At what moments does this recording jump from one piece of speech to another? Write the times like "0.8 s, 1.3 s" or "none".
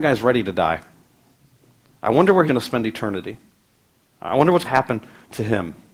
2.5 s, 4.6 s

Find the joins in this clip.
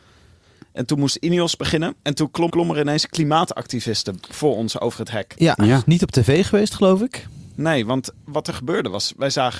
2.0 s, 2.5 s

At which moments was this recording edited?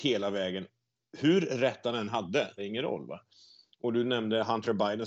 2.6 s

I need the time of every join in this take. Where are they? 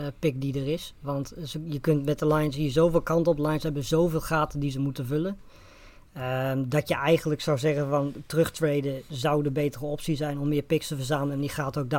none

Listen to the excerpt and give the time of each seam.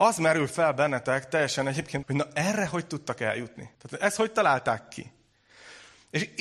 2.0 s, 3.7 s

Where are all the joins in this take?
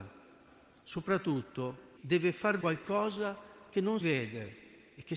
2.0 s, 2.6 s, 4.0 s

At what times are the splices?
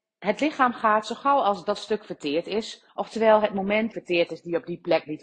2.9 s, 3.9 s

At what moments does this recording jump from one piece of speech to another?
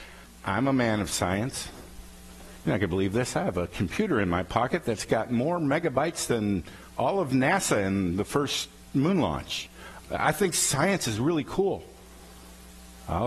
none

